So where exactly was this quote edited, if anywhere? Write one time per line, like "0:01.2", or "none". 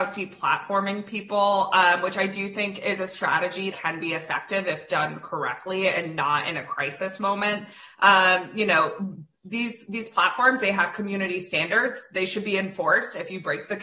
0:03.7